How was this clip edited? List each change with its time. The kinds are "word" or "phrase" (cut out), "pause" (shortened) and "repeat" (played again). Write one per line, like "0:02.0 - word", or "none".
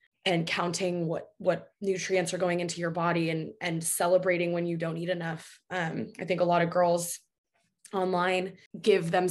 none